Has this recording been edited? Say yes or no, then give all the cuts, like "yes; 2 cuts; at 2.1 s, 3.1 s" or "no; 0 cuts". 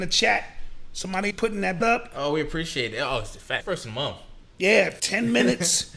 yes; 4 cuts; at 1.3 s, 1.8 s, 3.6 s, 5.0 s